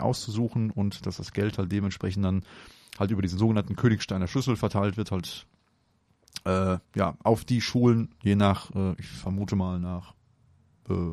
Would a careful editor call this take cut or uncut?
cut